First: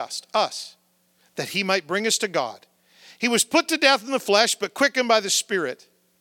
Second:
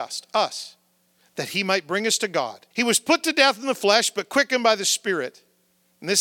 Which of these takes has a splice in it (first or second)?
second